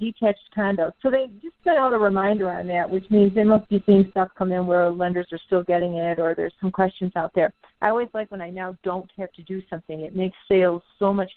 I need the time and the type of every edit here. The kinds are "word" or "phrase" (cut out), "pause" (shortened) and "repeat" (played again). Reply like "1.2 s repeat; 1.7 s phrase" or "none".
none